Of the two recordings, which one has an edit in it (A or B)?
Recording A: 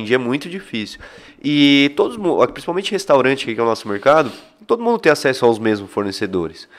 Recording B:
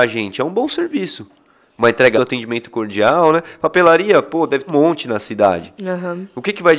B